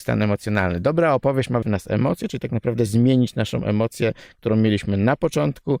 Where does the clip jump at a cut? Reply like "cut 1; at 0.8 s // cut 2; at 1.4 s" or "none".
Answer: cut 1; at 1.6 s